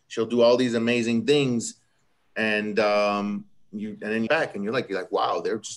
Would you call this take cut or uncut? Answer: cut